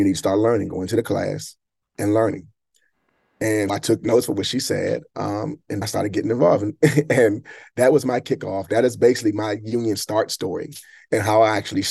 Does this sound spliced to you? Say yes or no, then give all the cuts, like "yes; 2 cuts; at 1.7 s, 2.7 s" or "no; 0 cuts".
yes; 2 cuts; at 3.7 s, 5.8 s